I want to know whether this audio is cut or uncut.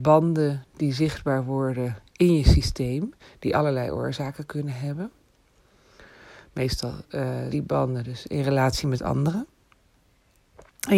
cut